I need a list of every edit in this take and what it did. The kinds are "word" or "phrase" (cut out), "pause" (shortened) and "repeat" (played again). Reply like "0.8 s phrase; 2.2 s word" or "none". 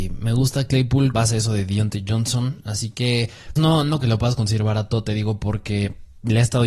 1.1 s word; 3.6 s word; 4.0 s word